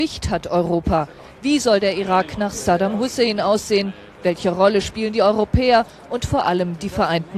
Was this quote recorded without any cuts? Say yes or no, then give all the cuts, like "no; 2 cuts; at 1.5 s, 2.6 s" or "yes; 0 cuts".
yes; 0 cuts